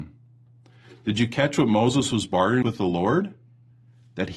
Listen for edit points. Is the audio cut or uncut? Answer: cut